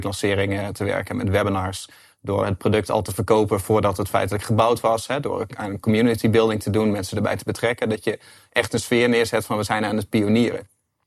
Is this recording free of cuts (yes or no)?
yes